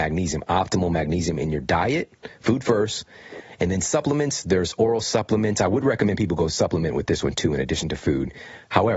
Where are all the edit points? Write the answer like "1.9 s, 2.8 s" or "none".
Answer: none